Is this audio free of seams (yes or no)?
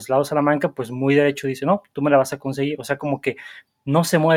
yes